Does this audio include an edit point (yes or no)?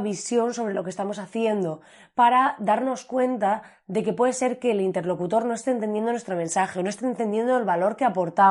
no